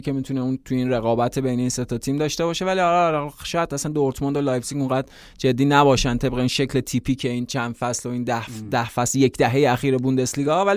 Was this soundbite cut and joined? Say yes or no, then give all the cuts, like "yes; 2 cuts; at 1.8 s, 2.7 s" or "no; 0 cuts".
no; 0 cuts